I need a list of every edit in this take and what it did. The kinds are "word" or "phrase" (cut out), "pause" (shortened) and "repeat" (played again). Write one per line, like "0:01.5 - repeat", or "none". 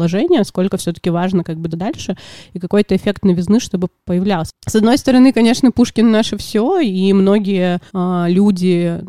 0:01.7 - word
0:04.6 - pause
0:07.9 - pause